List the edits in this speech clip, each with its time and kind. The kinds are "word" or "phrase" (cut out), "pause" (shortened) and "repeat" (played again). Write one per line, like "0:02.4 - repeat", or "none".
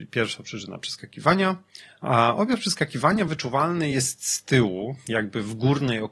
none